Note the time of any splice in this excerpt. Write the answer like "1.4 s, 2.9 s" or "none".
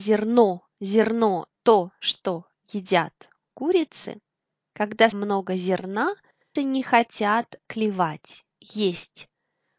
1.5 s, 5.1 s, 6.6 s, 7.6 s

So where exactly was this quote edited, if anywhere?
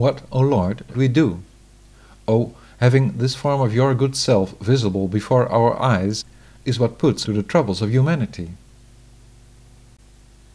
0.9 s, 7.3 s

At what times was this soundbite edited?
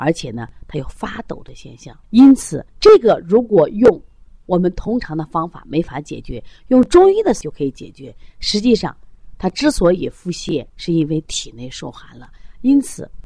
2.0 s, 2.7 s, 10.7 s

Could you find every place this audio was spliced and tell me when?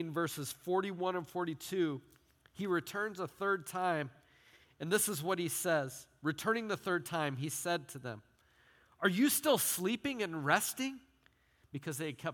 none

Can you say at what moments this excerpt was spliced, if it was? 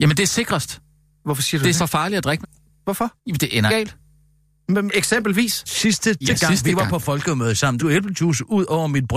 1.8 s, 2.4 s, 3.2 s, 3.7 s, 4.9 s, 6.2 s, 7.8 s

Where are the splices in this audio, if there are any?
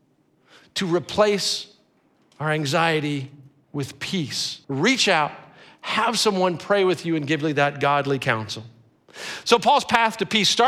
4.6 s

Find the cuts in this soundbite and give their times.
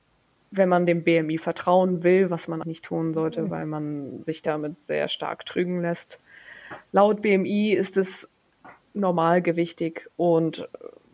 2.6 s

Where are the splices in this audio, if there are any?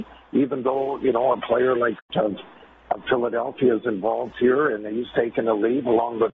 none

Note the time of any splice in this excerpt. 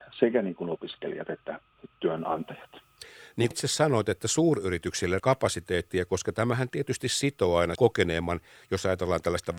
3.5 s, 5.2 s, 7.8 s

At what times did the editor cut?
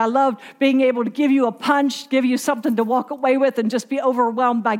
none

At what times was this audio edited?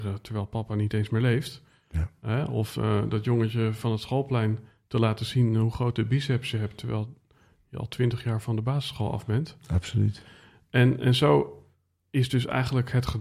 none

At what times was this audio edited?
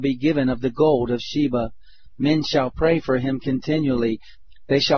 none

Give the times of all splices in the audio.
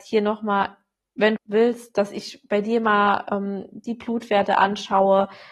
1.4 s

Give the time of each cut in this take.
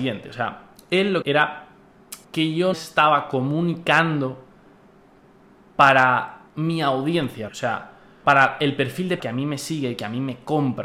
1.2 s, 2.2 s, 2.7 s, 6.5 s, 7.5 s, 8.2 s, 9.2 s

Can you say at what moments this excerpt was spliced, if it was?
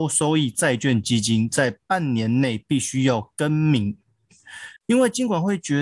4.8 s

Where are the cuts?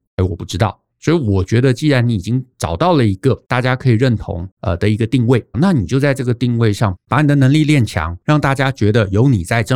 2.5 s, 3.4 s, 4.5 s, 5.5 s, 8.2 s

